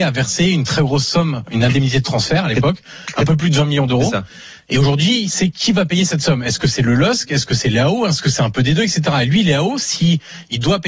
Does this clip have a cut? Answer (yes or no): no